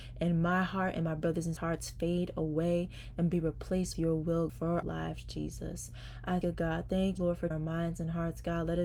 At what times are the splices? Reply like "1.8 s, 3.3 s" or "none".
1.6 s, 3.9 s, 4.5 s, 4.8 s, 6.4 s, 7.2 s, 7.5 s